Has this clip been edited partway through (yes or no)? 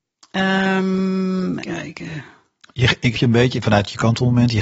yes